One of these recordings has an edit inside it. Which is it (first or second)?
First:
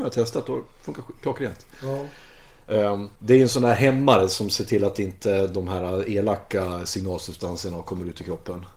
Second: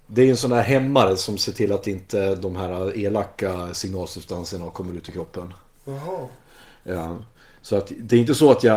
first